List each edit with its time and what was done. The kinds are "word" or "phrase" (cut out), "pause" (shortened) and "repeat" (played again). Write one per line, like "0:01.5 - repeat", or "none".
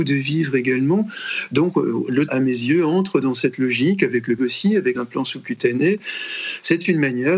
0:02.3 - word
0:04.4 - word
0:04.9 - word